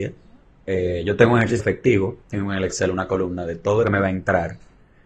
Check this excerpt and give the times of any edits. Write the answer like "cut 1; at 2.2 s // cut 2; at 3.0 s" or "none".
cut 1; at 1.6 s // cut 2; at 2.2 s // cut 3; at 3.8 s